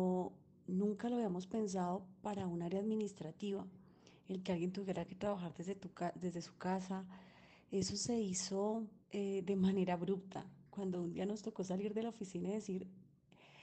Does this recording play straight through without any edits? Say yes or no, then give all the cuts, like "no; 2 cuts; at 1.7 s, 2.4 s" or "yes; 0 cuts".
no; 2 cuts; at 9.0 s, 10.7 s